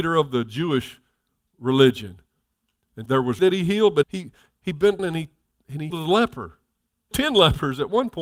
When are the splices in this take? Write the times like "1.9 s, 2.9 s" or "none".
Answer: 3.1 s, 3.4 s, 4.0 s, 5.0 s, 5.9 s, 7.1 s